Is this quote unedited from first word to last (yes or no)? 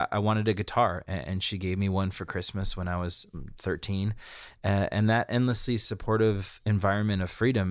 yes